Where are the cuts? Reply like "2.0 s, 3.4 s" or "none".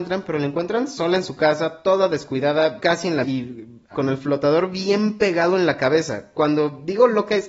2.8 s, 3.2 s, 3.9 s